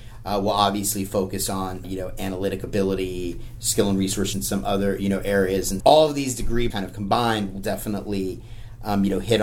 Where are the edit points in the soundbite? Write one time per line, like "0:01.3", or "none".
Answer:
0:01.8
0:04.3
0:05.8
0:06.7